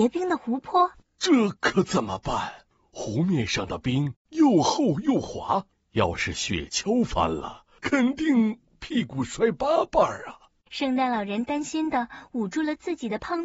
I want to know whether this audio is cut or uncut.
uncut